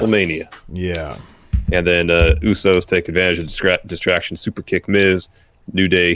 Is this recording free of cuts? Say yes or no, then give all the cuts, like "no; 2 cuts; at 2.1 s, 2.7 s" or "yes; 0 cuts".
yes; 0 cuts